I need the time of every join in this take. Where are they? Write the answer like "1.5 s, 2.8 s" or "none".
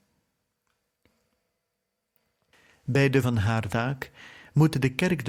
3.2 s, 3.7 s